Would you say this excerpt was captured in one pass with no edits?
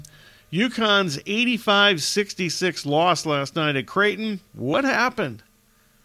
yes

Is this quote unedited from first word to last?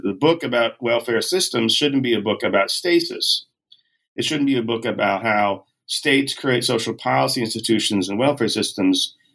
yes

